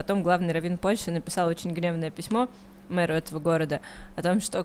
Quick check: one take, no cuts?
yes; 0 cuts

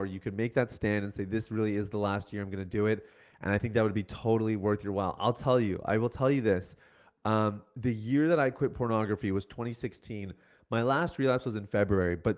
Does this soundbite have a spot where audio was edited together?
no; 0 cuts

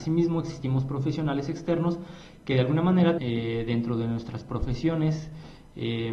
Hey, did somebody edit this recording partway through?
yes; 1 cut; at 3.2 s

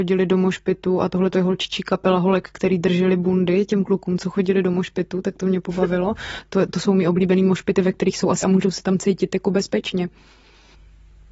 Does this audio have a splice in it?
yes; 2 cuts; at 6.7 s, 8.4 s

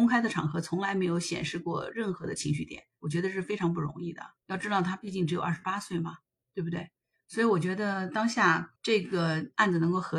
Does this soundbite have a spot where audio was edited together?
yes; 2 cuts; at 4.4 s, 8.8 s

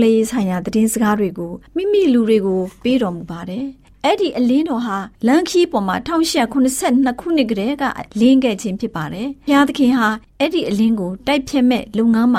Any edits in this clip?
yes; 3 cuts; at 1.7 s, 5.1 s, 8.1 s

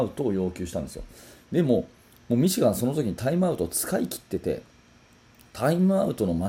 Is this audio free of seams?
yes; 0 cuts

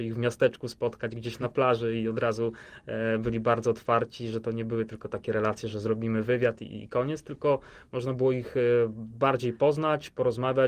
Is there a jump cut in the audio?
no; 0 cuts

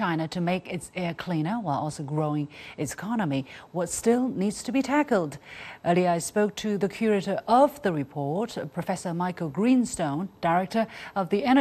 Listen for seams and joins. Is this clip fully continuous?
yes; 0 cuts

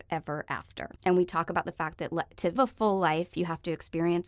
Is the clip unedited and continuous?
no; 2 cuts; at 1.0 s, 2.6 s

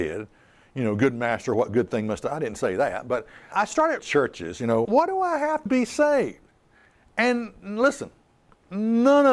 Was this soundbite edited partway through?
yes; 4 cuts; at 3.5 s, 4.0 s, 4.8 s, 5.7 s

